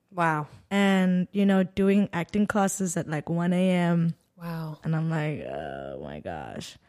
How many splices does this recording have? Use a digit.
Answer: 0